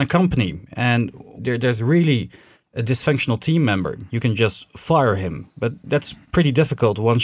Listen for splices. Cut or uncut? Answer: uncut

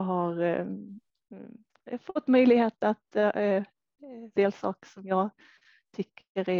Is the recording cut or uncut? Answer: cut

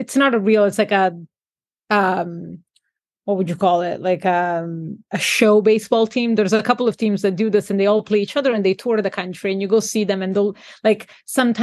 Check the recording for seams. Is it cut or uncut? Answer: uncut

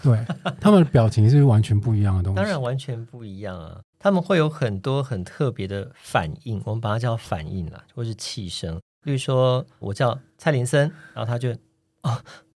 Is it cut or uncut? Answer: cut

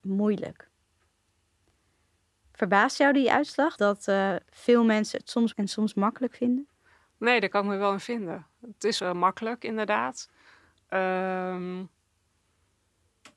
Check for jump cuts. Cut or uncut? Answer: cut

